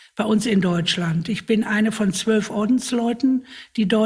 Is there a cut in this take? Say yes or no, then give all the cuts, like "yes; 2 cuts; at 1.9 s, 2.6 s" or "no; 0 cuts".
no; 0 cuts